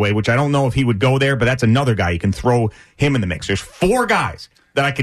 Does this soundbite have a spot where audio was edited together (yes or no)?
no